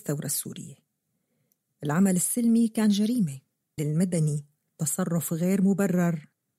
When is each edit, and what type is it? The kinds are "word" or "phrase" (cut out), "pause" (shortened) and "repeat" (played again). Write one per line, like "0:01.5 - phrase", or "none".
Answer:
0:03.8 - word